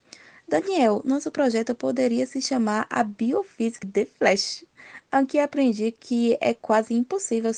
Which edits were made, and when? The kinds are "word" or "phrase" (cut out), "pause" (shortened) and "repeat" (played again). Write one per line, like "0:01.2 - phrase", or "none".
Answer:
0:03.8 - phrase

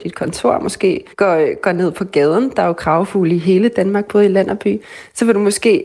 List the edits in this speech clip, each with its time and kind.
0:01.1 - pause

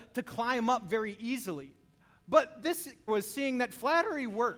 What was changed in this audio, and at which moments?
0:02.0 - pause
0:03.1 - word

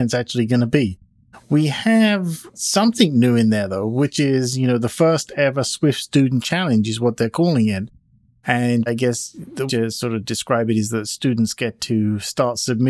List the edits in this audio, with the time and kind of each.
0:02.5 - word
0:08.9 - word
0:09.7 - word

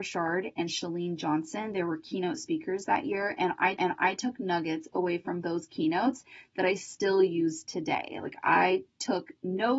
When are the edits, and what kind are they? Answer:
0:03.8 - repeat
0:05.4 - phrase

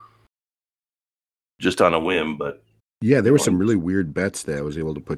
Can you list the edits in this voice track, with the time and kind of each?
0:02.8 - pause

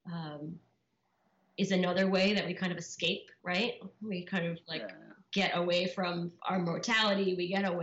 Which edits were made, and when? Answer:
0:03.4 - pause
0:06.4 - pause

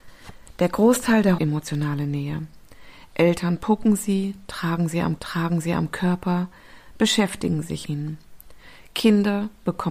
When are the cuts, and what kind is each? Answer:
0:01.4 - phrase
0:05.2 - repeat
0:07.9 - word

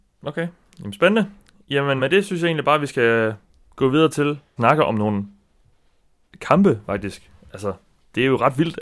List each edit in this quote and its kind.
0:02.0 - word
0:04.6 - word

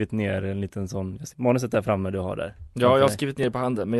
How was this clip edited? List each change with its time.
0:01.3 - word

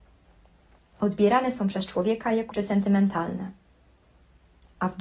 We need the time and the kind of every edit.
0:02.5 - word

